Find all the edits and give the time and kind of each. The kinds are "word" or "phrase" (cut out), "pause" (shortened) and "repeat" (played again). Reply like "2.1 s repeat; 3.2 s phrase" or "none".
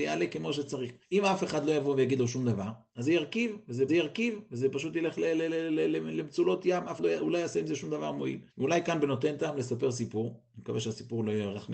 1.0 s pause; 3.9 s repeat; 7.0 s word; 8.5 s pause

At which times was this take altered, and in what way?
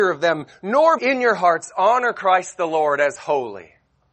1.0 s phrase

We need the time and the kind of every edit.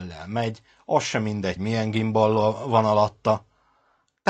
1.6 s word

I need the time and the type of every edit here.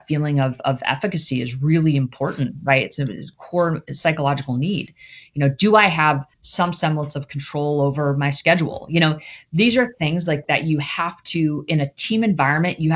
6.3 s pause

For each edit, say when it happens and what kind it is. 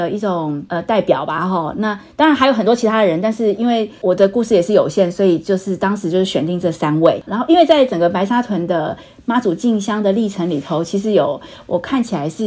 none

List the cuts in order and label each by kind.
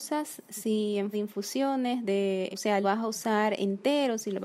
1.1 s word; 2.5 s word; 2.8 s phrase

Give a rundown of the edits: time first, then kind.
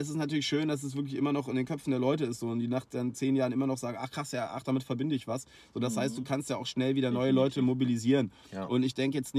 none

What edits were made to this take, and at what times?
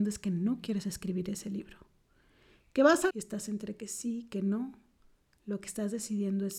3.1 s phrase

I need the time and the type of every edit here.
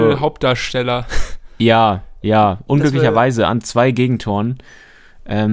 none

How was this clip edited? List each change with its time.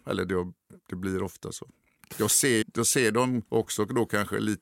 2.6 s word; 3.5 s pause

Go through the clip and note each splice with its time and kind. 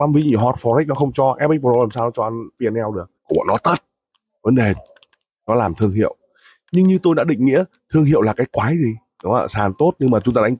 3.2 s pause

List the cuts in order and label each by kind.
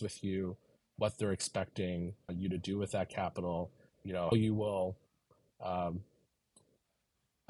2.3 s word; 3.9 s word; 4.3 s word

